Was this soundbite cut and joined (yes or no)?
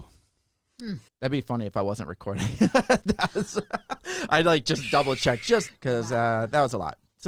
yes